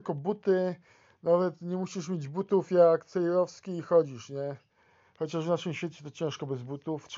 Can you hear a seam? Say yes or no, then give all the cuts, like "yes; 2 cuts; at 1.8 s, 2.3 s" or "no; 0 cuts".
yes; 1 cut; at 4.8 s